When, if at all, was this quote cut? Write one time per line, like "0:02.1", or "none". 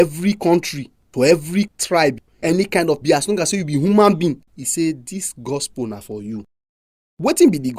0:01.0
0:03.0
0:04.5